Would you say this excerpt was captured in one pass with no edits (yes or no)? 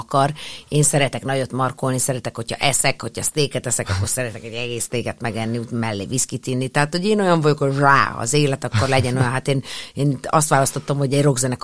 yes